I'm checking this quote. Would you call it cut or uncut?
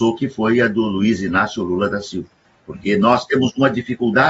uncut